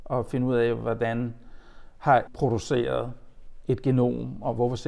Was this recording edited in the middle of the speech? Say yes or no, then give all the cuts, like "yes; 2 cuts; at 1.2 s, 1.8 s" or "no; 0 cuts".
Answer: yes; 1 cut; at 2.3 s